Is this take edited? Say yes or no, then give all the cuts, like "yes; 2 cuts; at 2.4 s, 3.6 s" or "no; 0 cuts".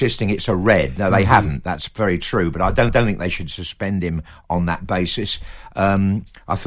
yes; 1 cut; at 2.9 s